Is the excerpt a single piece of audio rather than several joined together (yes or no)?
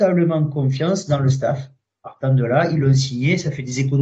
yes